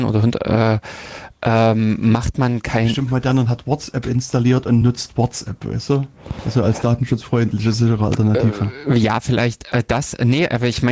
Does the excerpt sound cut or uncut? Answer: uncut